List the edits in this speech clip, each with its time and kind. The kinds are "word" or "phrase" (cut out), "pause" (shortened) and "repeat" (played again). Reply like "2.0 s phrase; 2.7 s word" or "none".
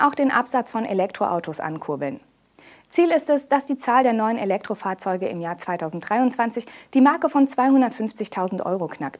none